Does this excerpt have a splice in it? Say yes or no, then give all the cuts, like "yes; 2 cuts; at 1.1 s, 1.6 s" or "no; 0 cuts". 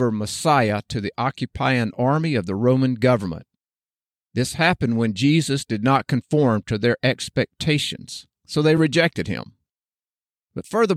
no; 0 cuts